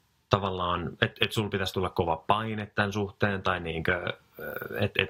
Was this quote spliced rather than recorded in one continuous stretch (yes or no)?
no